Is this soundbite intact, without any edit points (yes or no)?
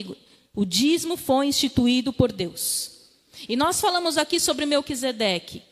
yes